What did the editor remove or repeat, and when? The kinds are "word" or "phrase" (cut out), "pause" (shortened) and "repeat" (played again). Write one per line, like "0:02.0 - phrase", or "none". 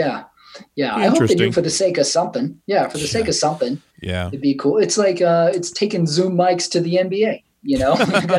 0:03.9 - pause